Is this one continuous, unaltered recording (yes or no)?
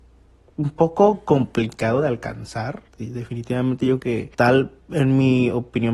no